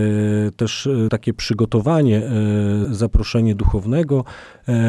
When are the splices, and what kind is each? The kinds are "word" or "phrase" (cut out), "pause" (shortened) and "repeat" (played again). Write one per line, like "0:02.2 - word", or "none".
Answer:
0:01.1 - word
0:02.8 - word